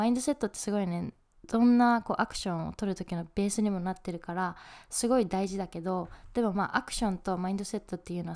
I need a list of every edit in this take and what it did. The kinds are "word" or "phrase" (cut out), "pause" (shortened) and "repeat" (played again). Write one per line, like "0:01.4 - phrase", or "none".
none